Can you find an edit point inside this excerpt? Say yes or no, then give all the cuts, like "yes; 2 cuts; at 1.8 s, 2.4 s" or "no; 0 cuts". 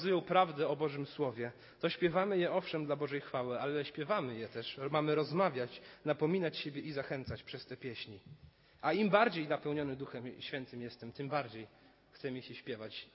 no; 0 cuts